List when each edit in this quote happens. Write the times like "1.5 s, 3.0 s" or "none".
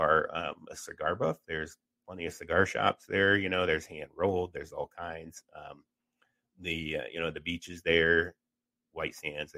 none